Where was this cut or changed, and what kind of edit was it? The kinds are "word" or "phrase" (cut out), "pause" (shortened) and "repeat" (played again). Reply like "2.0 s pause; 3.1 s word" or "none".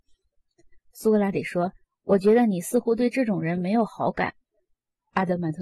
1.8 s pause